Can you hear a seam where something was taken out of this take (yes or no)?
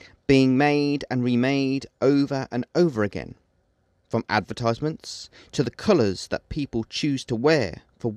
no